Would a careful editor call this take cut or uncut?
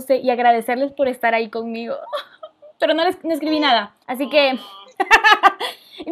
cut